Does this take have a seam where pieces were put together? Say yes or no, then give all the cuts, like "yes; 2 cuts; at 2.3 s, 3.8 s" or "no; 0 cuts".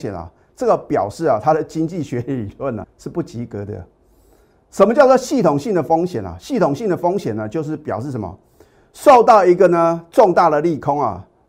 yes; 1 cut; at 2.8 s